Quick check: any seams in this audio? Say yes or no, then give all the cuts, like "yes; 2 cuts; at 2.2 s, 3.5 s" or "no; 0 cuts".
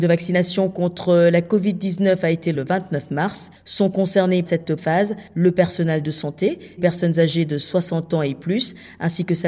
yes; 4 cuts; at 2.5 s, 4.5 s, 4.8 s, 6.8 s